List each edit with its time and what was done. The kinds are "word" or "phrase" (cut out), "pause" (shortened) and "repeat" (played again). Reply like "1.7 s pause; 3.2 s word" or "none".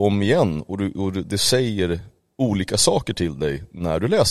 none